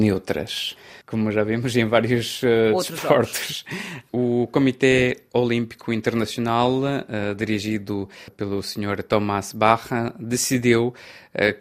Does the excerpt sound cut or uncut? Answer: uncut